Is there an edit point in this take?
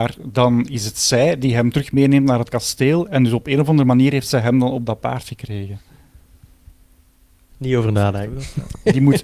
no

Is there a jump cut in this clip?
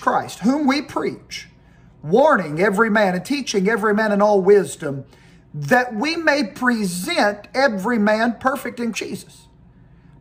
yes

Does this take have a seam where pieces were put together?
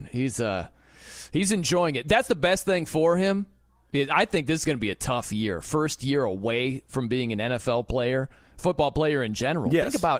yes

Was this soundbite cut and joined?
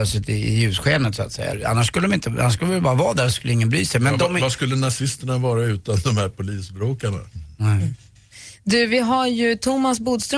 yes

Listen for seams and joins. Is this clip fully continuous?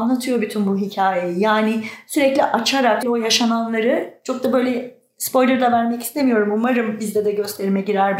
no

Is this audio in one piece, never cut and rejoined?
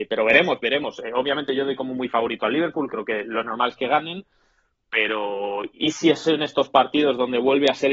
yes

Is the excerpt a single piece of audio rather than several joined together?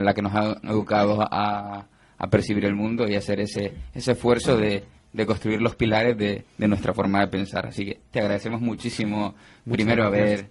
no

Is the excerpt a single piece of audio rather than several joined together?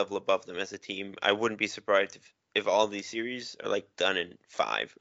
yes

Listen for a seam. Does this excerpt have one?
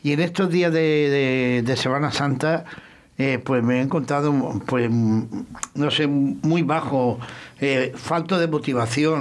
no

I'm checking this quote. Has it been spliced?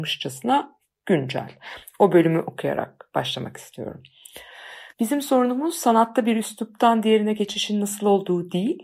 yes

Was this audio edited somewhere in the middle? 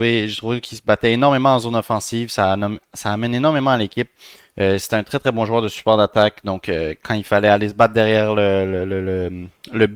no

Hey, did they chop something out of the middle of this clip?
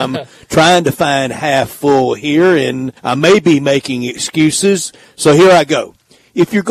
yes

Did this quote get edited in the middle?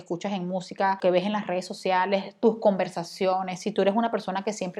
no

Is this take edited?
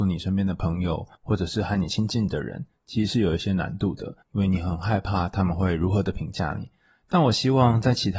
yes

